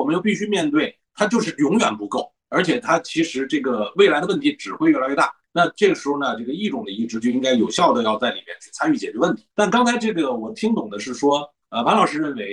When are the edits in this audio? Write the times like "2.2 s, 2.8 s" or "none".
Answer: 9.5 s